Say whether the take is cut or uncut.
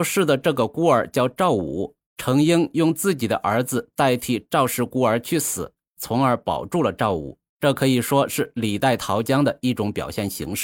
cut